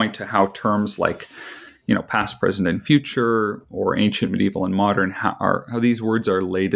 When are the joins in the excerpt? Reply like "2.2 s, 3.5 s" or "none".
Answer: none